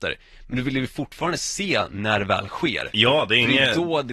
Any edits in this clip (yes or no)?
no